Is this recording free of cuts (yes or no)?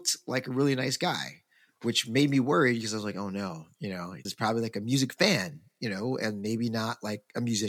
no